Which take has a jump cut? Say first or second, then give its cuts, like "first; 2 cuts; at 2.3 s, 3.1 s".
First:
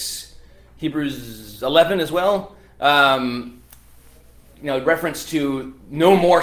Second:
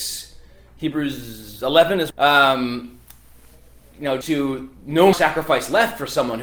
second; 3 cuts; at 2.1 s, 4.2 s, 5.1 s